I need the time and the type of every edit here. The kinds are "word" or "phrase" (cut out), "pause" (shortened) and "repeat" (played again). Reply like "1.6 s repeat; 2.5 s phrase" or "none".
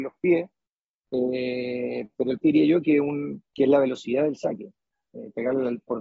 2.4 s word; 3.5 s pause